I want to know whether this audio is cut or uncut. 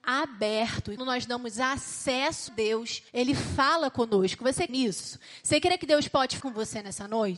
cut